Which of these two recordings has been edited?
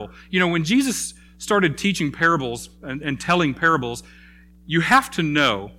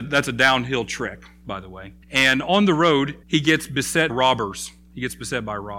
second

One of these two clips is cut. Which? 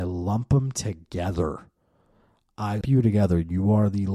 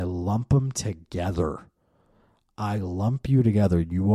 first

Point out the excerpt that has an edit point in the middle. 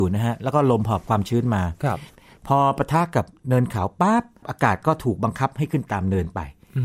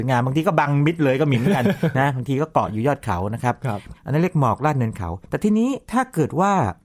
second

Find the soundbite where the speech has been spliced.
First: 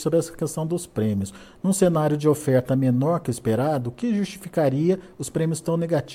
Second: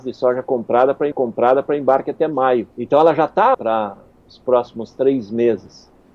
second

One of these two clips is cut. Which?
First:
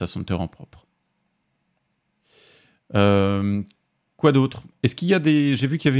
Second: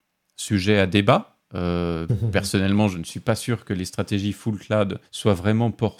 second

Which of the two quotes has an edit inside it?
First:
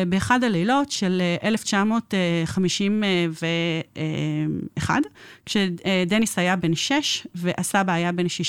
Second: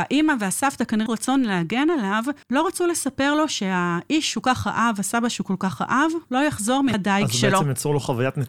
second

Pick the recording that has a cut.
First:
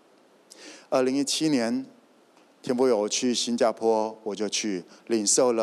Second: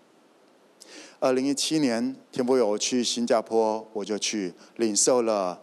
second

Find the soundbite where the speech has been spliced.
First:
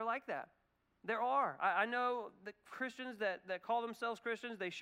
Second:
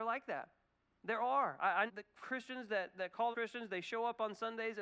second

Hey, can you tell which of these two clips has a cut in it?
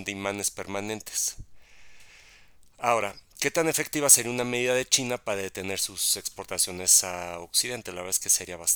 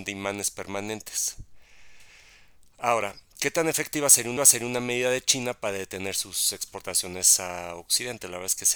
second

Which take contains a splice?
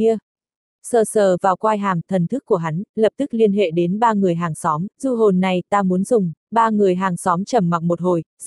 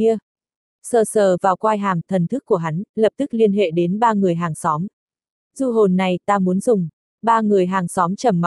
first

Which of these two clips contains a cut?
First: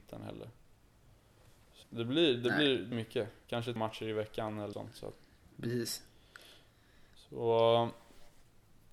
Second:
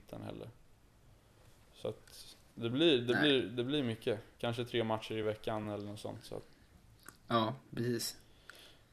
first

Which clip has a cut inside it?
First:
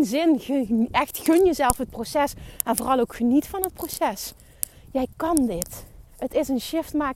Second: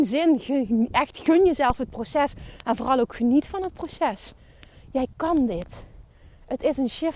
first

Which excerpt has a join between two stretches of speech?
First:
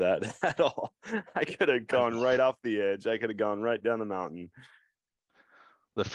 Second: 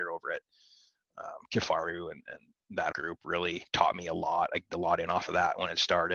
second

